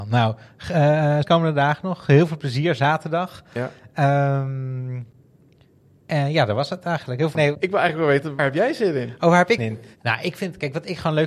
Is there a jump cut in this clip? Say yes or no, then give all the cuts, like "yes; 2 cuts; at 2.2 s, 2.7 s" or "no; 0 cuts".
yes; 4 cuts; at 1.2 s, 7.3 s, 8.4 s, 9.6 s